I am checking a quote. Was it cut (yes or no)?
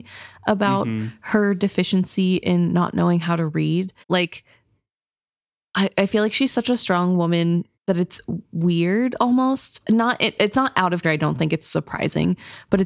yes